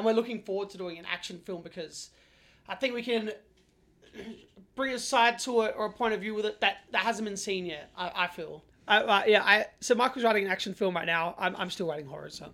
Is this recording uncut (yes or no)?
yes